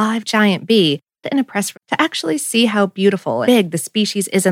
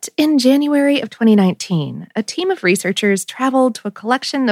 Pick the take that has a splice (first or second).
first